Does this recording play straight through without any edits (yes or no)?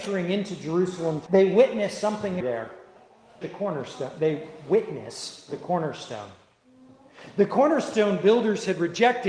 no